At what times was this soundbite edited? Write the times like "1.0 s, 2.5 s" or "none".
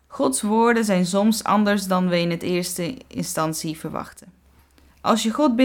none